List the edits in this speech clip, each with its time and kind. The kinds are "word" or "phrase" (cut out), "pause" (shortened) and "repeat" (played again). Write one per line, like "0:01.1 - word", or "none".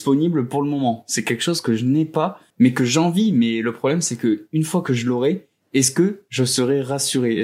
0:02.5 - pause